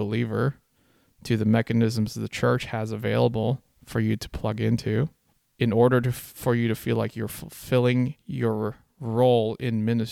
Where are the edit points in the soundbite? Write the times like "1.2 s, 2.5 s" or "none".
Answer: none